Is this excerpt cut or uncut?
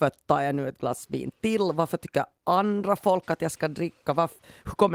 uncut